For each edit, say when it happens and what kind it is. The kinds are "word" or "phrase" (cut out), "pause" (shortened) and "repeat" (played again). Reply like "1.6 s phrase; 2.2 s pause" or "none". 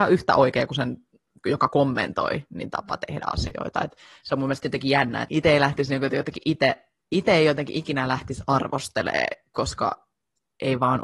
none